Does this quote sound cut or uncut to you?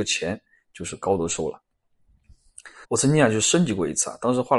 cut